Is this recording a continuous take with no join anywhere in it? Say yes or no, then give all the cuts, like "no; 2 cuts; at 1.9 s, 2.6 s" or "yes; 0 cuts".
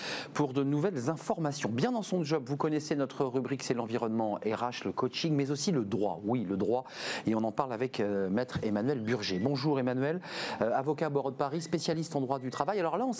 yes; 0 cuts